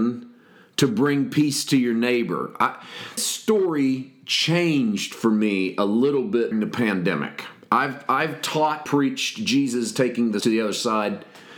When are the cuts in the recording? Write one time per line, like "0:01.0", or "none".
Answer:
0:03.2
0:06.5
0:08.9
0:10.4